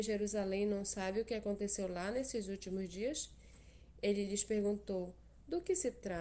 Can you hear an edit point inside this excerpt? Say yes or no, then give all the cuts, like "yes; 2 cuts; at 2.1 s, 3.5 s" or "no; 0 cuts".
no; 0 cuts